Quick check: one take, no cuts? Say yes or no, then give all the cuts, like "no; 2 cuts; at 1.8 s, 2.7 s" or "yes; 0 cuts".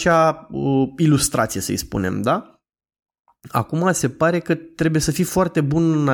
yes; 0 cuts